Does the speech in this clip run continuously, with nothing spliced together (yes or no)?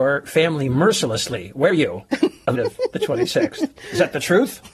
no